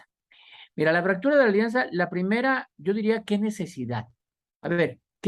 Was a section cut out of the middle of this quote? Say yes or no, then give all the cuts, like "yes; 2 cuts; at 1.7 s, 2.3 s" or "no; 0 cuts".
no; 0 cuts